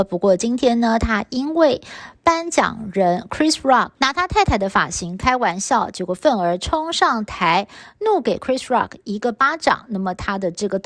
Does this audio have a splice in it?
yes; 1 cut; at 4.0 s

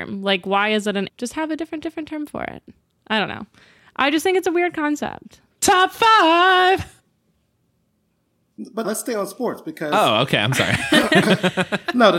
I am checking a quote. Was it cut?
yes; 4 cuts; at 1.1 s, 1.8 s, 5.5 s, 8.8 s

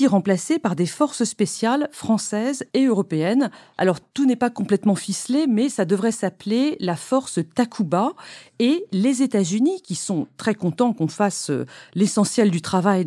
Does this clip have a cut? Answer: no; 0 cuts

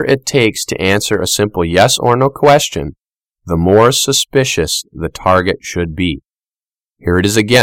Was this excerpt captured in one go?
yes; 0 cuts

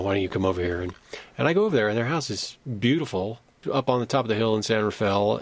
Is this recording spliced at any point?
no; 0 cuts

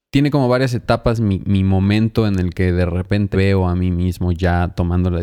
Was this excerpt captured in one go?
no; 2 cuts; at 1.4 s, 3.3 s

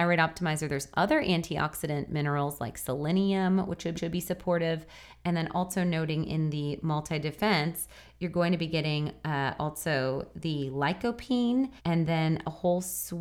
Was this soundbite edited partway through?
yes; 2 cuts; at 3.9 s, 11.8 s

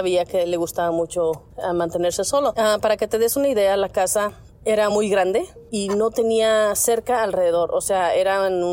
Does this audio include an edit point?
no; 0 cuts

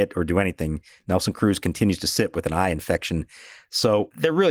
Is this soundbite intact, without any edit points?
yes; 0 cuts

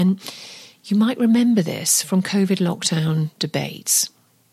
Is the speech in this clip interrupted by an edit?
no; 0 cuts

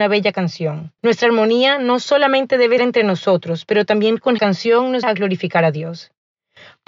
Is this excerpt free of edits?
no; 4 cuts; at 1.0 s, 2.8 s, 4.4 s, 5.0 s

